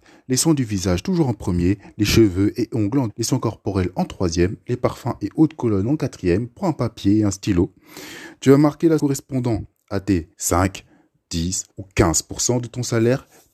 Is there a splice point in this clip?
yes; 4 cuts; at 3.1 s, 9.0 s, 10.3 s, 11.7 s

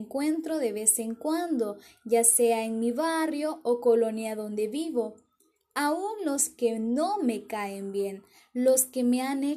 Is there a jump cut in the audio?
no; 0 cuts

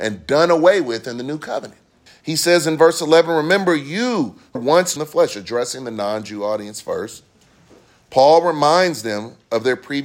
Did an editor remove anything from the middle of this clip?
yes; 3 cuts; at 2.1 s, 4.6 s, 5.0 s

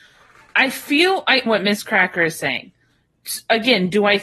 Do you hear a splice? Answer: yes; 1 cut; at 1.5 s

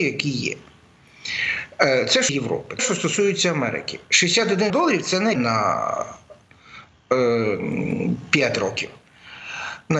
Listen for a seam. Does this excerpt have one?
yes; 4 cuts; at 2.3 s, 2.8 s, 4.7 s, 5.3 s

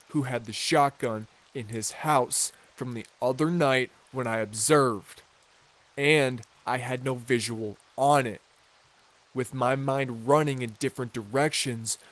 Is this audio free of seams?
yes; 0 cuts

